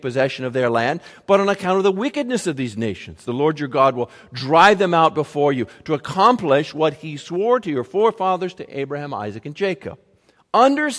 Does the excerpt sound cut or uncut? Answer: uncut